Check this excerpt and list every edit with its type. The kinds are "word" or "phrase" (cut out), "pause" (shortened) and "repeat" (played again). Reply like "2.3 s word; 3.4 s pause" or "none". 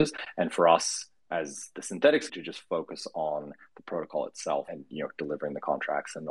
2.3 s word; 4.7 s word